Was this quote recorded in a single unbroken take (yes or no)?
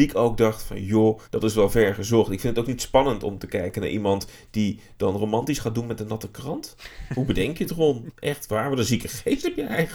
no